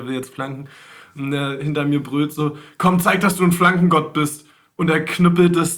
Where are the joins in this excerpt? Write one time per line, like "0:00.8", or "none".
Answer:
none

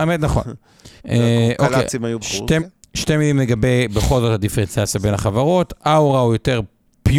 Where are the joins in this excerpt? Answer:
0:01.0
0:02.2
0:02.6

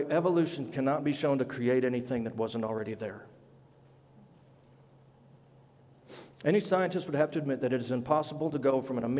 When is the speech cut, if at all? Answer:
0:06.3

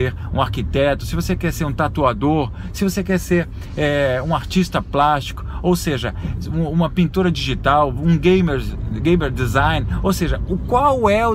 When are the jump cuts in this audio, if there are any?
none

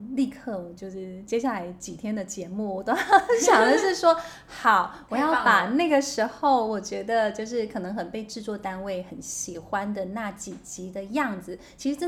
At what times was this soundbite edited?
none

